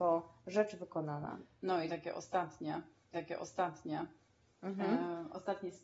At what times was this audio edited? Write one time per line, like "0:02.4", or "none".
0:03.1